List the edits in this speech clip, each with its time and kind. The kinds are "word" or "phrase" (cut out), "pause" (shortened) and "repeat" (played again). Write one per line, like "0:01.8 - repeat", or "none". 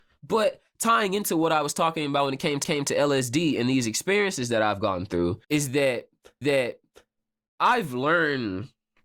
0:02.6 - repeat
0:05.4 - pause
0:06.4 - repeat